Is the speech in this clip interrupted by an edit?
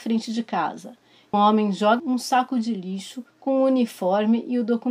yes; 3 cuts; at 1.3 s, 2.0 s, 3.3 s

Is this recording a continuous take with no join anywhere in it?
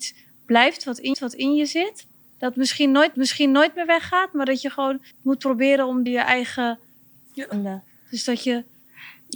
no; 6 cuts; at 1.1 s, 2.2 s, 3.1 s, 5.1 s, 6.1 s, 7.5 s

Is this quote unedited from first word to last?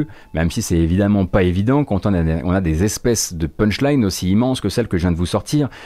yes; 0 cuts

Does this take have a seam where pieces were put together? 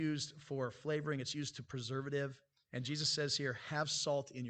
no; 0 cuts

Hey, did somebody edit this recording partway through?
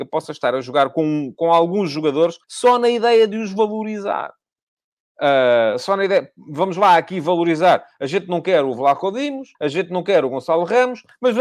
yes; 4 cuts; at 1.3 s, 2.4 s, 4.6 s, 9.5 s

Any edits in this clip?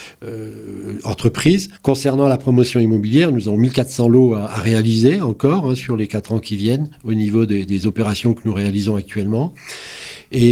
yes; 1 cut; at 1.8 s

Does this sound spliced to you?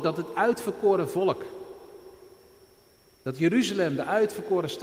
no; 0 cuts

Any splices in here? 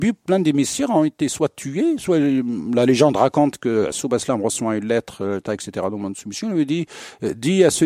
no; 0 cuts

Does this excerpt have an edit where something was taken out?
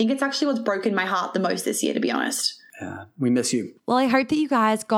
yes; 1 cut; at 3.8 s

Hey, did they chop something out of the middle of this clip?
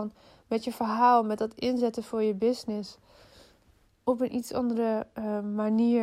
no; 0 cuts

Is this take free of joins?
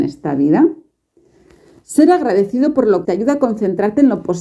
no; 1 cut; at 3.0 s

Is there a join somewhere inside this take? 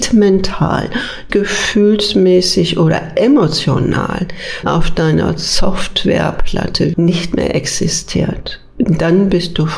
yes; 3 cuts; at 1.3 s, 4.6 s, 6.9 s

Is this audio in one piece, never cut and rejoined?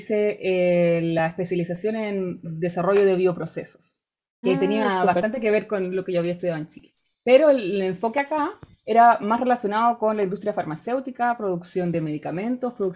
no; 1 cut; at 4.4 s

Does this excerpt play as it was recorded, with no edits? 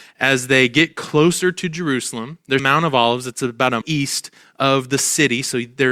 no; 2 cuts; at 2.6 s, 3.8 s

